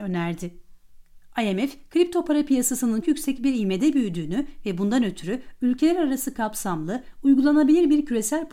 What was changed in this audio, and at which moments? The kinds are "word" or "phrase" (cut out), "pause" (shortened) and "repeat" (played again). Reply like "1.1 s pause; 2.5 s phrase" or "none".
3.0 s word